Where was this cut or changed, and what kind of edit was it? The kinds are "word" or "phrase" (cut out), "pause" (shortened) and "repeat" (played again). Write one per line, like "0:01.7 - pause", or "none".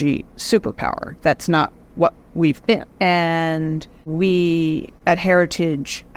0:02.9 - pause